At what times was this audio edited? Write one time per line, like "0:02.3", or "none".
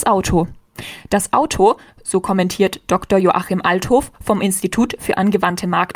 none